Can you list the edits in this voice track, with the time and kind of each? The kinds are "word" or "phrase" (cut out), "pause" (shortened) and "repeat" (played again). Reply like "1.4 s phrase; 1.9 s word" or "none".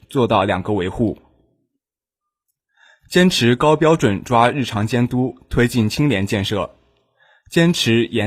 none